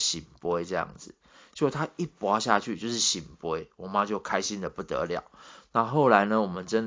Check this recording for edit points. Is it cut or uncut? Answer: uncut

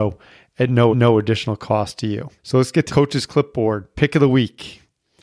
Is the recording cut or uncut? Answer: cut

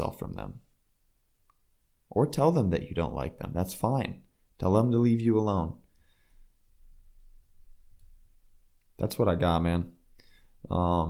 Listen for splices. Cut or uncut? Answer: uncut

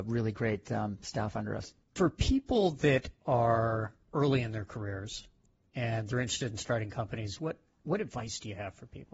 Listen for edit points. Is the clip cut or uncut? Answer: uncut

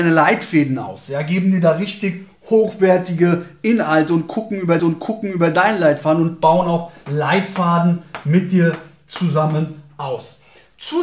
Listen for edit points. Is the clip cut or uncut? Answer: cut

